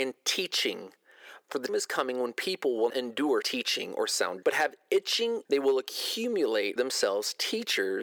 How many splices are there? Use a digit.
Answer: 6